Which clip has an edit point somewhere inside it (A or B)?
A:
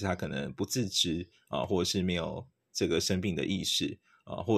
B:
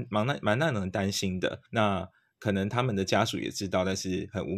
B